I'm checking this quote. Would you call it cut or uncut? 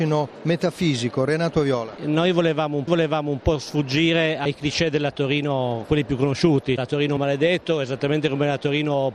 cut